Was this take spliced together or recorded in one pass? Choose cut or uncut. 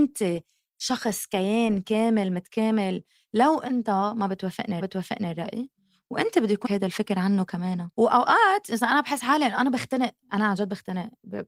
cut